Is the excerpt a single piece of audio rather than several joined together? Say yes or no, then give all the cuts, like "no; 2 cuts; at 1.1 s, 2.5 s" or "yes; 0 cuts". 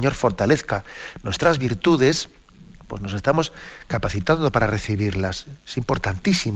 yes; 0 cuts